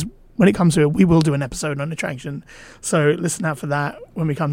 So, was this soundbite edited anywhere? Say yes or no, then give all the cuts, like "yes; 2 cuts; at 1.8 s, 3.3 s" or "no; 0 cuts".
no; 0 cuts